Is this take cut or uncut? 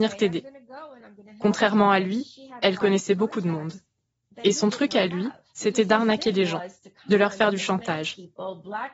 uncut